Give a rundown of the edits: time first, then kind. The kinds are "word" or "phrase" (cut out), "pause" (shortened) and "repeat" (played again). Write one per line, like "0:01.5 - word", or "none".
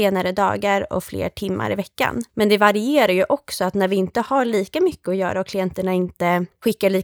0:02.3 - pause